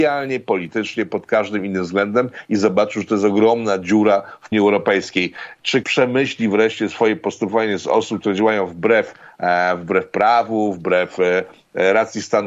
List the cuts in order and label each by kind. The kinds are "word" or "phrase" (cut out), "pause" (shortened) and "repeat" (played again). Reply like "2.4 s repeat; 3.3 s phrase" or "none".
4.5 s phrase; 5.8 s word